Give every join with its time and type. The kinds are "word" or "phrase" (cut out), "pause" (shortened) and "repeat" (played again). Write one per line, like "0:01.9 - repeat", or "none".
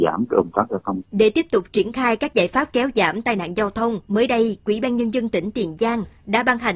0:01.1 - pause
0:04.0 - pause